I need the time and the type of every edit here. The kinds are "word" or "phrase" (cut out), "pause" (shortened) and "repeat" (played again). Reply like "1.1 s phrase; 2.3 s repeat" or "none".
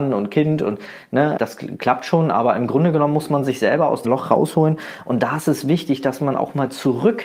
1.4 s word; 4.0 s word